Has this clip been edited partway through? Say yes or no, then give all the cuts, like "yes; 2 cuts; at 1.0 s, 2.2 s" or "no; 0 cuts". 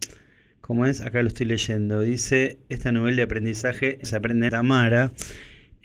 yes; 2 cuts; at 4.0 s, 4.5 s